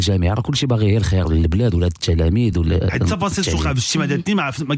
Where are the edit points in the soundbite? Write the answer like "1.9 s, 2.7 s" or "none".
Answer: none